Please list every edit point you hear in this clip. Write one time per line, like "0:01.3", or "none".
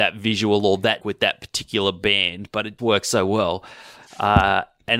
0:01.0
0:02.8